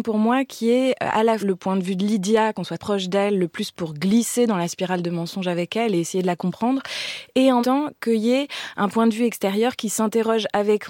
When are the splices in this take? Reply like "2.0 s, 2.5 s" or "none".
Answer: 1.4 s, 2.8 s, 3.7 s, 7.6 s